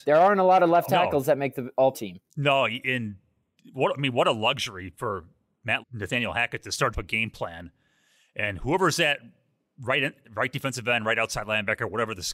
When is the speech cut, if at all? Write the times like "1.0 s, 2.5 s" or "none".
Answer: 1.9 s, 2.3 s, 5.8 s, 6.9 s